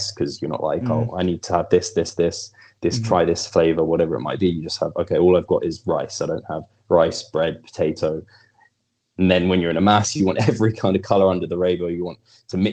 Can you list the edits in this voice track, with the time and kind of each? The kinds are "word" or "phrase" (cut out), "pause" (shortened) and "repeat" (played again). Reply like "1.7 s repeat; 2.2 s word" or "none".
none